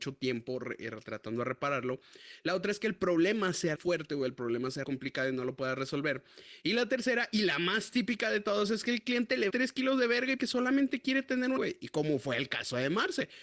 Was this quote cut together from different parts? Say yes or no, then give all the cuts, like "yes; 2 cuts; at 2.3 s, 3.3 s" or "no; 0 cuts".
yes; 5 cuts; at 3.8 s, 4.8 s, 9.5 s, 10.4 s, 11.6 s